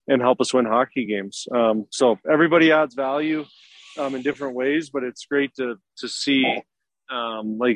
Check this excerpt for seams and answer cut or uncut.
uncut